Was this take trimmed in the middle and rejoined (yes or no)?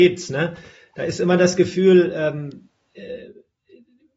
no